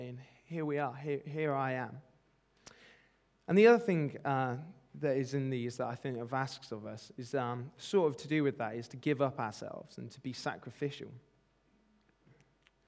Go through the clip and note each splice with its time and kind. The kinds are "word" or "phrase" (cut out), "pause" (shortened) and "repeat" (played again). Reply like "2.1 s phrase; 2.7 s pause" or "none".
none